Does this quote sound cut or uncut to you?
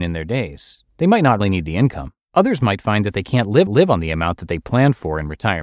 cut